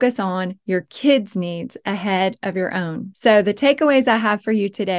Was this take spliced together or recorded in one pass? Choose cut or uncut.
uncut